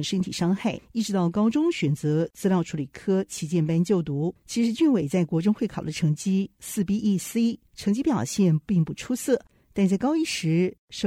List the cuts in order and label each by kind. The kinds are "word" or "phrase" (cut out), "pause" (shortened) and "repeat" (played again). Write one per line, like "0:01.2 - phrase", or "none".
none